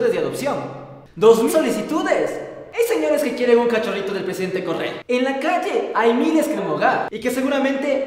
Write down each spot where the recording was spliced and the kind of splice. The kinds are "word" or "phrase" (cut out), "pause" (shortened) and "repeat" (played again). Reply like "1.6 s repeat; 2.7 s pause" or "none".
1.5 s word; 6.6 s word